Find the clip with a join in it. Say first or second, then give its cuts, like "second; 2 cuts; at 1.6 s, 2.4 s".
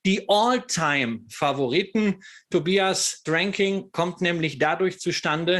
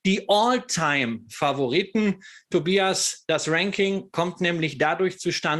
first; 1 cut; at 3.3 s